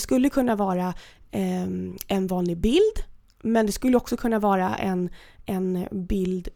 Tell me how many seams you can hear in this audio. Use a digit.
0